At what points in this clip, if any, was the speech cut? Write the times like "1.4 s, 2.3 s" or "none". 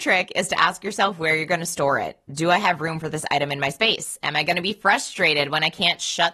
none